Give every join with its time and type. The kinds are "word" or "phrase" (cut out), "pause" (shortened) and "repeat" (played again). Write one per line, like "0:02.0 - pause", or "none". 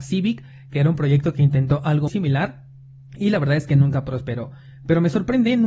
0:02.1 - word